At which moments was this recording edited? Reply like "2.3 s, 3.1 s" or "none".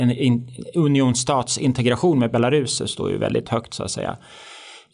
none